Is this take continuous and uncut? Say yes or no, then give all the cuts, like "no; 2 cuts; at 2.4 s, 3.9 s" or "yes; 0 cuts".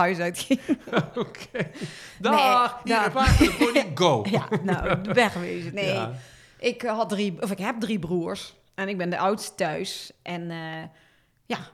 no; 1 cut; at 3.1 s